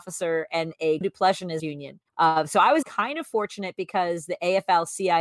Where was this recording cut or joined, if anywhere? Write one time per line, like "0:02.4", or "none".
0:01.0
0:01.6
0:02.1
0:02.8